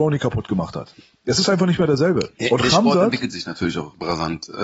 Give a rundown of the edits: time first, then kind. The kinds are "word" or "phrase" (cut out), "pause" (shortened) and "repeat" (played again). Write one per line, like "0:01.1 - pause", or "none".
none